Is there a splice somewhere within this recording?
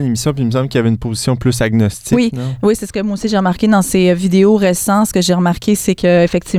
no; 0 cuts

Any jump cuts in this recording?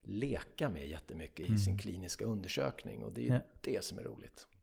no; 0 cuts

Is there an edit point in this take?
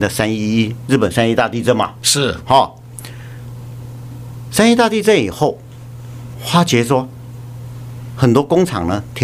yes; 1 cut; at 6.3 s

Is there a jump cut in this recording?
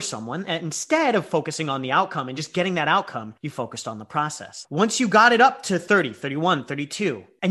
no; 0 cuts

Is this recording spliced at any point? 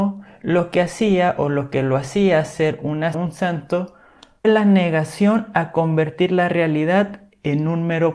yes; 2 cuts; at 3.1 s, 4.4 s

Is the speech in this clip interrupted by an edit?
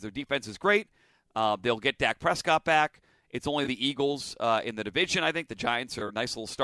no; 0 cuts

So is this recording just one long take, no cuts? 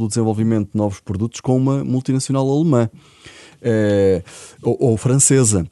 yes; 0 cuts

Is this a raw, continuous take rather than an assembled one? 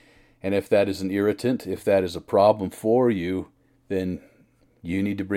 yes; 0 cuts

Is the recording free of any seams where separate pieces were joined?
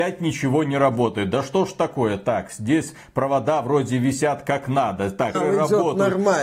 no; 1 cut; at 5.3 s

